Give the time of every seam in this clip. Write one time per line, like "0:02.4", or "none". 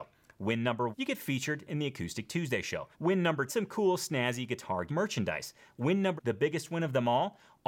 0:00.9
0:02.9
0:03.5
0:04.9
0:06.2